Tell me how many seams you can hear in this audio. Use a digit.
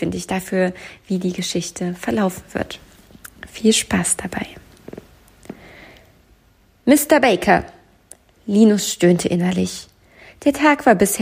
0